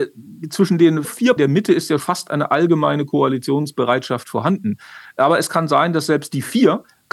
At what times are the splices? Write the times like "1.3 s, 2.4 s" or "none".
1.0 s, 1.4 s, 2.0 s